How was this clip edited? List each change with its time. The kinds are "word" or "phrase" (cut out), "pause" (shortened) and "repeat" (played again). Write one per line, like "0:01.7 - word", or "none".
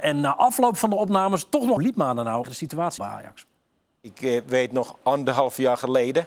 0:01.8 - phrase
0:02.4 - phrase
0:03.0 - word
0:03.6 - pause